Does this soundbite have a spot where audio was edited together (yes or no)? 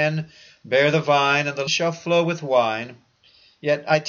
yes